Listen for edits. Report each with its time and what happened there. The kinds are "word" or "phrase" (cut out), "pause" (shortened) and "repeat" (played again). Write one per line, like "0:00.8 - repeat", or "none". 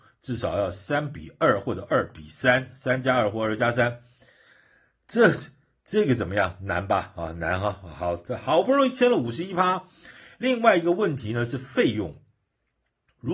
none